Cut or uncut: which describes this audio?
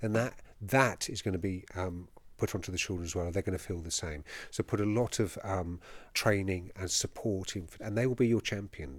cut